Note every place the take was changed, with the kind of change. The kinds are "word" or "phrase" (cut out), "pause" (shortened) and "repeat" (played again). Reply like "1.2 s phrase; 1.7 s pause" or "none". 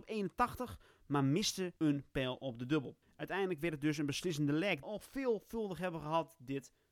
1.8 s pause; 3.0 s pause; 4.8 s phrase